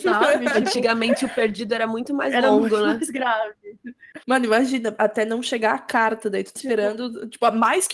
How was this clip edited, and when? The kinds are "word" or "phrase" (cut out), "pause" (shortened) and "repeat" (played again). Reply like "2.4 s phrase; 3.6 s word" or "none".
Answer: 4.2 s pause; 6.6 s phrase